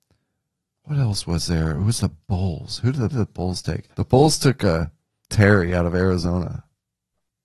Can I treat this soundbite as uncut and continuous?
no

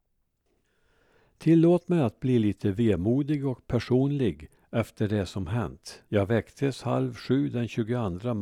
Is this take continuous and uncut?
no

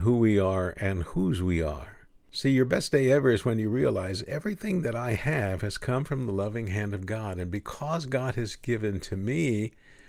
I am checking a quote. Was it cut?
no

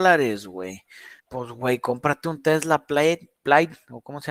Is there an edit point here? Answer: yes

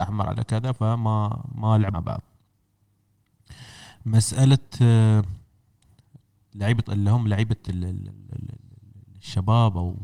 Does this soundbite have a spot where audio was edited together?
yes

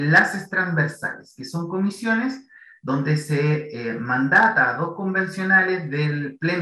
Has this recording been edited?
no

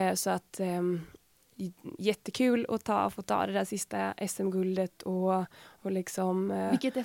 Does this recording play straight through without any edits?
yes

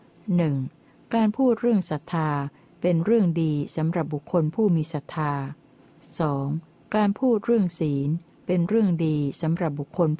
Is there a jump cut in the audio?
yes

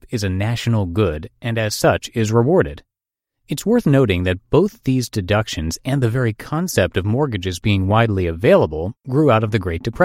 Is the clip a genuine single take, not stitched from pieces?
yes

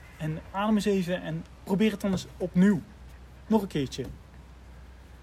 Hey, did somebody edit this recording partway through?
no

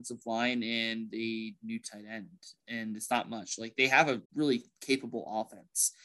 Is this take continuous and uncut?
no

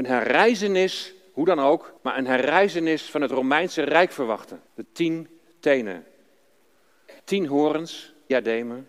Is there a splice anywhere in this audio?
yes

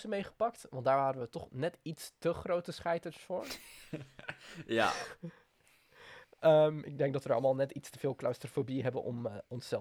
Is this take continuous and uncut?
yes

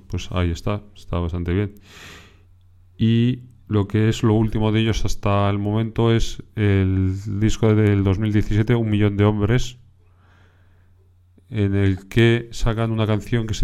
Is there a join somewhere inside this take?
no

